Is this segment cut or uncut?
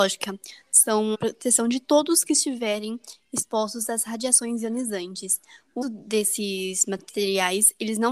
cut